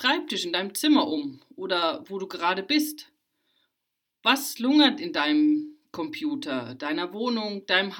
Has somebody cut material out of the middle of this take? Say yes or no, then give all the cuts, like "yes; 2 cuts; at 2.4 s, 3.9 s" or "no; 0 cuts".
no; 0 cuts